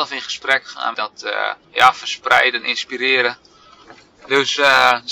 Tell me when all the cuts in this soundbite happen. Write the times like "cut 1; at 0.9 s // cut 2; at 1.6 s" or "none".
cut 1; at 0.9 s // cut 2; at 1.6 s

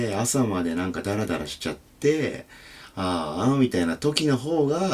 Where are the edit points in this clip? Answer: none

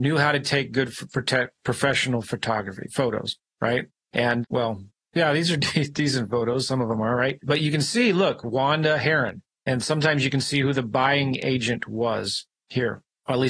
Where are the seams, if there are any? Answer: none

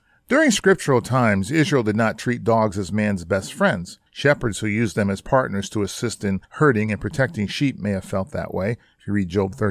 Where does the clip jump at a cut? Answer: cut 1; at 4.1 s // cut 2; at 6.4 s

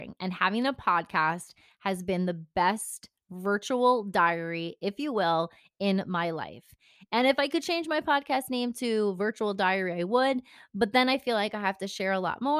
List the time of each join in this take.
none

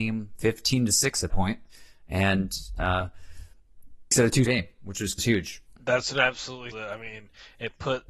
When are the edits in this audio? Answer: cut 1; at 1.3 s // cut 2; at 4.1 s // cut 3; at 4.5 s // cut 4; at 5.2 s // cut 5; at 5.8 s // cut 6; at 6.7 s

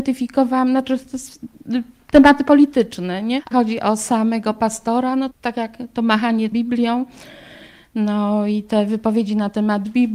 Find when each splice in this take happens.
cut 1; at 3.5 s // cut 2; at 5.3 s // cut 3; at 6.5 s

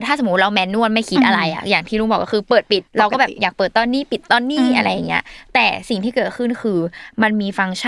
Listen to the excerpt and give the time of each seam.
cut 1; at 2.9 s

